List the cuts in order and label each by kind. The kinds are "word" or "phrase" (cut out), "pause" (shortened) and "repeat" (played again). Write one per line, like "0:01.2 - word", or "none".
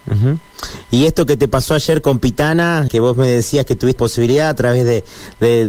0:02.9 - word
0:04.0 - word